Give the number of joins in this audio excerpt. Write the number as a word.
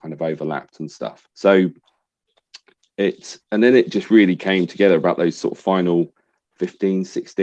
two